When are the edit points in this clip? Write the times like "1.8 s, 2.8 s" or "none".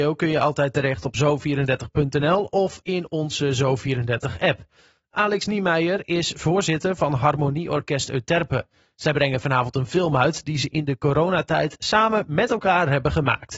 none